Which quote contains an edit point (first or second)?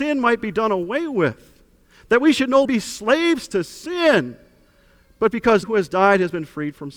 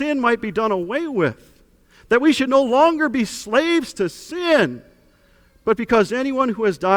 first